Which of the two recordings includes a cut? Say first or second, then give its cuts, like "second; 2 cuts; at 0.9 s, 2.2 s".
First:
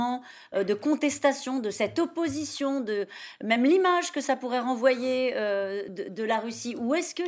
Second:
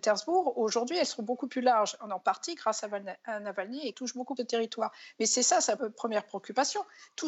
second; 3 cuts; at 3.9 s, 4.4 s, 5.8 s